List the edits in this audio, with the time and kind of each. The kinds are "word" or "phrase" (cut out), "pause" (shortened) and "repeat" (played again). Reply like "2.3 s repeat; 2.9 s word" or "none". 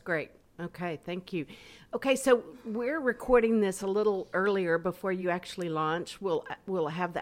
none